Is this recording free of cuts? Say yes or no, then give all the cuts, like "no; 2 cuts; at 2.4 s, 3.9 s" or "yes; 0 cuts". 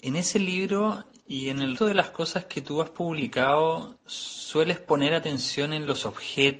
no; 1 cut; at 1.8 s